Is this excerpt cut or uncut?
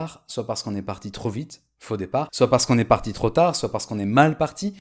uncut